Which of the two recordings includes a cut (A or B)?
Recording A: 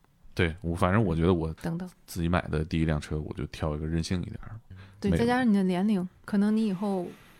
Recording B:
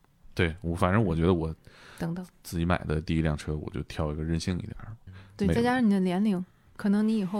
A